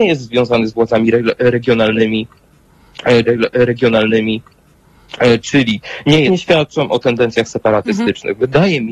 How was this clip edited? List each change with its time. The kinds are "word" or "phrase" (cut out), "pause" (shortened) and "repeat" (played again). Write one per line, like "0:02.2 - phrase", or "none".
0:03.3 - repeat
0:06.3 - phrase